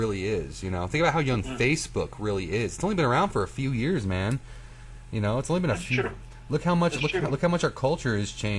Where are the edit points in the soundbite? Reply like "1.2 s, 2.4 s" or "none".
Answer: none